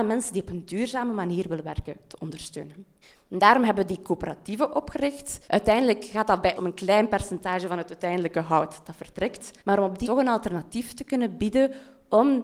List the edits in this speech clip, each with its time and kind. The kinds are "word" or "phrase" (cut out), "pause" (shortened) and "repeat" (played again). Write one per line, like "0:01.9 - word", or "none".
0:03.0 - pause
0:05.4 - pause
0:06.6 - word
0:09.6 - pause
0:10.0 - word